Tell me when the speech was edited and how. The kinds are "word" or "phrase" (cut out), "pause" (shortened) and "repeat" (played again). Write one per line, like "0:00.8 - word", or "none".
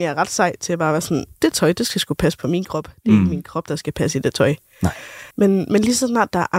0:01.3 - pause
0:05.3 - pause